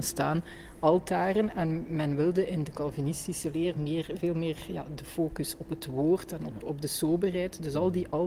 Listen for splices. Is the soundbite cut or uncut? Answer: uncut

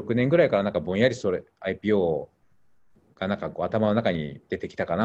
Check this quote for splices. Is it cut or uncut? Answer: uncut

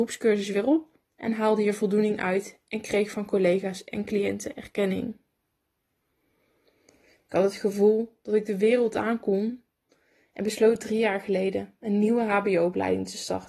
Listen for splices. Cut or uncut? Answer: cut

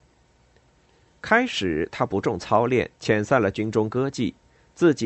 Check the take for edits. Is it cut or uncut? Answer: cut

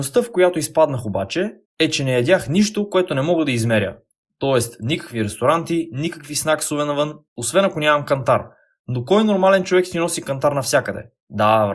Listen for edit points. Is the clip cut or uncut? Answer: uncut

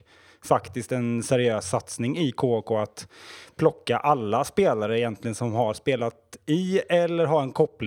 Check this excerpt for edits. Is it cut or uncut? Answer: uncut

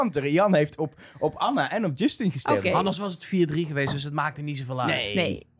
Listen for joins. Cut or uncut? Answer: uncut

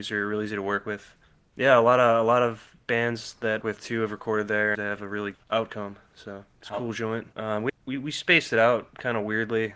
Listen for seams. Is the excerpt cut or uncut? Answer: cut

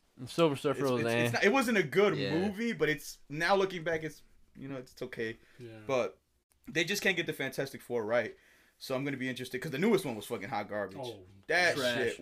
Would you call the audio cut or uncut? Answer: uncut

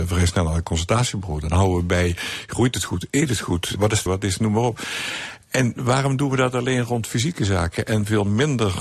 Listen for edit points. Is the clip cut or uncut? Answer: cut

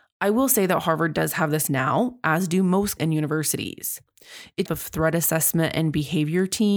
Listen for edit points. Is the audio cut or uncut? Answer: cut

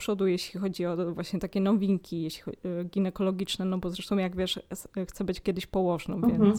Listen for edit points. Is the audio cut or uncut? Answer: uncut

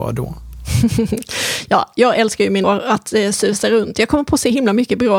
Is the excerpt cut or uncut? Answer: cut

